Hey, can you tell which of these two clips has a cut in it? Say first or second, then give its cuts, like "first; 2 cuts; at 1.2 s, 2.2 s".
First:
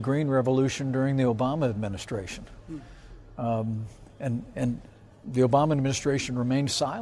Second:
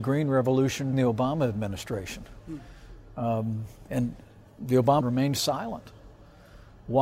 second; 3 cuts; at 0.9 s, 3.9 s, 5.0 s